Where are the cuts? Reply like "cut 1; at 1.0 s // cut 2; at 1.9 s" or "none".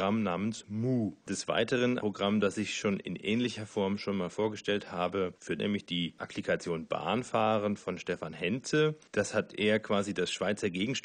cut 1; at 2.0 s // cut 2; at 5.6 s